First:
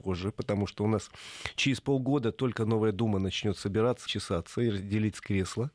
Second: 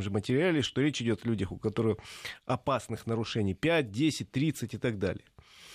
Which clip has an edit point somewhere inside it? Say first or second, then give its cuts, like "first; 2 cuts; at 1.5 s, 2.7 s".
first; 1 cut; at 4.1 s